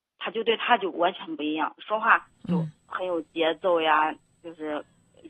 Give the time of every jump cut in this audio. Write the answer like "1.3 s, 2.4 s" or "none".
2.3 s